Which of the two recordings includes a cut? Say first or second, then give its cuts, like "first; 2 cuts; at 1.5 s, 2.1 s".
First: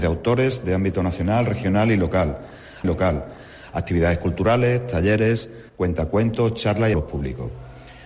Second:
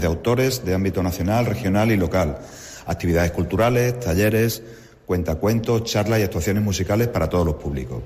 first; 3 cuts; at 2.8 s, 5.7 s, 6.9 s